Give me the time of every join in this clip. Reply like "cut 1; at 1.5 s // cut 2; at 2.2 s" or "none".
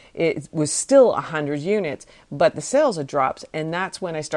none